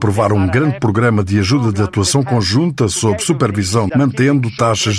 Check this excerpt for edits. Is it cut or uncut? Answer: cut